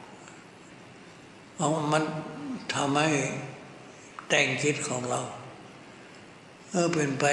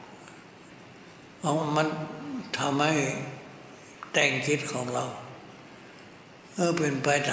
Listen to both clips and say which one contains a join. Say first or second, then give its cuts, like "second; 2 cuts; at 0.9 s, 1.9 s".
second; 1 cut; at 1.3 s